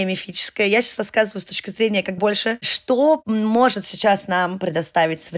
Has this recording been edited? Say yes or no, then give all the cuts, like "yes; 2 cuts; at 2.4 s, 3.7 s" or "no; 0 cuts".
yes; 1 cut; at 2.2 s